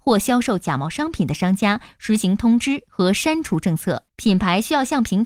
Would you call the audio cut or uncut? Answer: cut